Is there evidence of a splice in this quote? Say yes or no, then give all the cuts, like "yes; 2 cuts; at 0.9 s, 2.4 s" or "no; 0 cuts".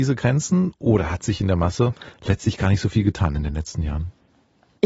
no; 0 cuts